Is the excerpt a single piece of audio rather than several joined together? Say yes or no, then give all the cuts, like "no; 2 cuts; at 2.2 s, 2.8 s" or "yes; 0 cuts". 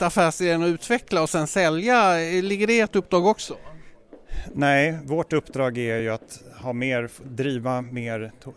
yes; 0 cuts